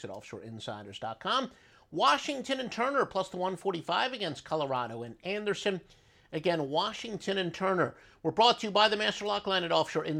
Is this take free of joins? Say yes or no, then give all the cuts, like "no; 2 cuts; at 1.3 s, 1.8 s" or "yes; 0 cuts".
yes; 0 cuts